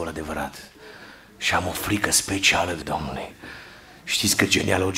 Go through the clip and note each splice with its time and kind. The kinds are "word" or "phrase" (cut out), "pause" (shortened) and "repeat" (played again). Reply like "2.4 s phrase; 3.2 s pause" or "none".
2.8 s word